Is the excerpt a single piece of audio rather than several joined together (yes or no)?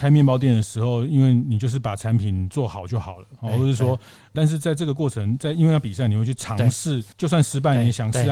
no